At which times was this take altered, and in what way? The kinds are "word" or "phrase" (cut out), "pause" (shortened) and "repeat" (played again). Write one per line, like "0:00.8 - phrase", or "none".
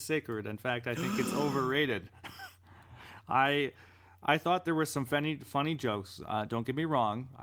none

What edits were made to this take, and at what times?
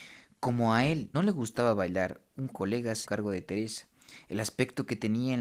0:01.1 - word
0:02.5 - word
0:03.0 - word

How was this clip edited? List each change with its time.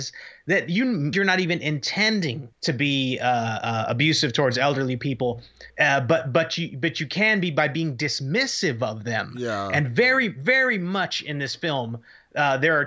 0:01.1 - word
0:02.5 - pause
0:05.7 - pause

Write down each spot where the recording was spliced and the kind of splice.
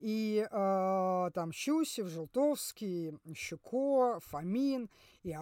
none

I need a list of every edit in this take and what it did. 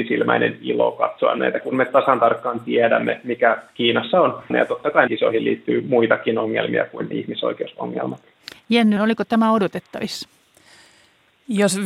0:01.6 - word
0:04.5 - word
0:05.1 - word
0:07.1 - word
0:09.0 - word

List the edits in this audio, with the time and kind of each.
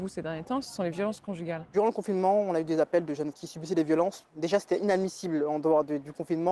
0:03.3 - word

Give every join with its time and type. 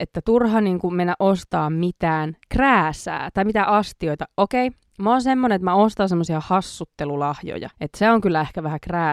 0:02.4 - pause
0:07.7 - pause

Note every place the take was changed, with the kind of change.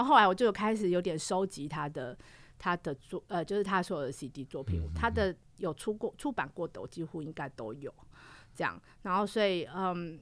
none

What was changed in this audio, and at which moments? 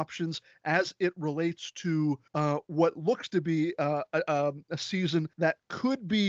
0:02.3 - pause
0:05.3 - pause

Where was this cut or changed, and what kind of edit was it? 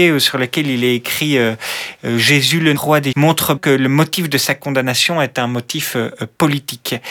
0:02.8 - word
0:03.1 - word
0:03.6 - word

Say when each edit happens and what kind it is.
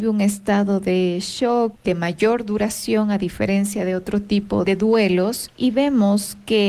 none

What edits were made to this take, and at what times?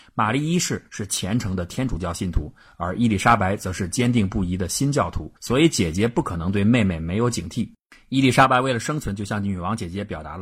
0:05.4 - pause

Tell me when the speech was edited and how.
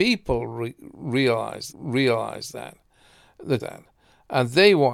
0:01.7 - repeat
0:03.6 - phrase

